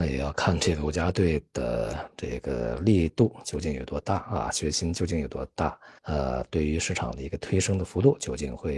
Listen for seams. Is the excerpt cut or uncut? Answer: cut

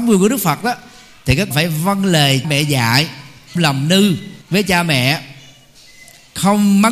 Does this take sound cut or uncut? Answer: cut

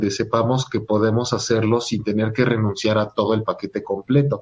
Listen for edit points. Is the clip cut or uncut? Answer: uncut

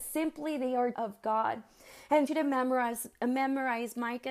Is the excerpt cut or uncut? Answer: cut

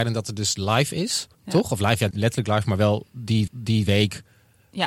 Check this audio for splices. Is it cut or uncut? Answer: cut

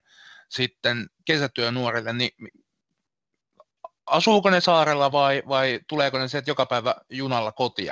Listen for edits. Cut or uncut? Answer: uncut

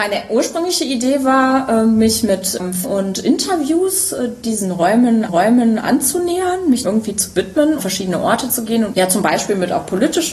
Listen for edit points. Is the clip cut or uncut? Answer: cut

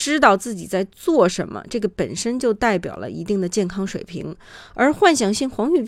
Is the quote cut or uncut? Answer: uncut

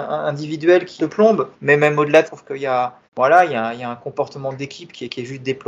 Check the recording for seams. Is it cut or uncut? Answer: cut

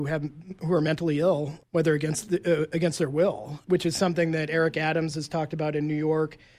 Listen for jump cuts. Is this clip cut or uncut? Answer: uncut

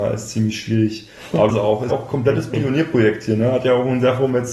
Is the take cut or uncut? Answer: cut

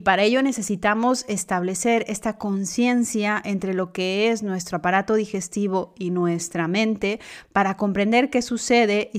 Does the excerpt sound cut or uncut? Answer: uncut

